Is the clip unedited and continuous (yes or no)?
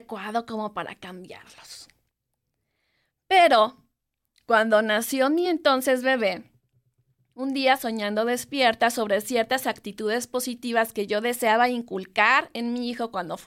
yes